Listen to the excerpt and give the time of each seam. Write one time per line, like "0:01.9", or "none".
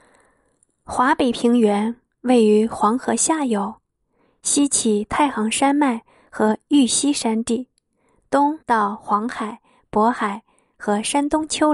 0:08.6